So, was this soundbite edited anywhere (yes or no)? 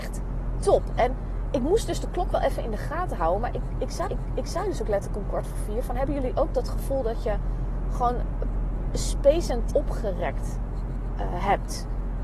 yes